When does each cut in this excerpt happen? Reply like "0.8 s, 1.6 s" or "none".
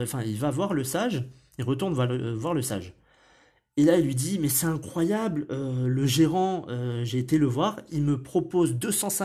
none